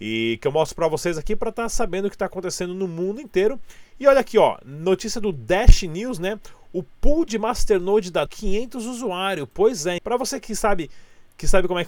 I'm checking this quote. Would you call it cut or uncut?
cut